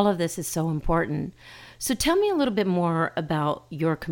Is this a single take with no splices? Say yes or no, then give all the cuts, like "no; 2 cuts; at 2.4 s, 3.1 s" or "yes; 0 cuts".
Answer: yes; 0 cuts